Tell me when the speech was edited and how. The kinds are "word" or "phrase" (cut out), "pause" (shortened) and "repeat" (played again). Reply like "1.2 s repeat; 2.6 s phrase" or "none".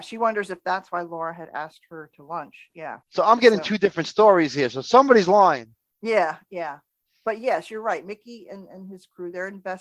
3.0 s pause